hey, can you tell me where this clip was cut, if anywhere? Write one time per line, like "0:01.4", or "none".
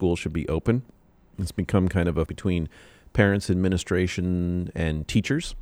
0:02.3